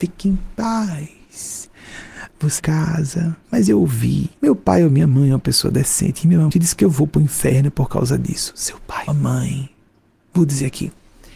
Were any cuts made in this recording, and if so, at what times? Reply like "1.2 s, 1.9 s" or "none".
2.6 s, 3.4 s, 4.4 s, 6.5 s, 9.1 s